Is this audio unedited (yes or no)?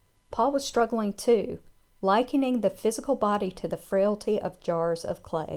yes